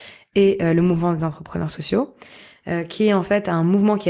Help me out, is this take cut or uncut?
uncut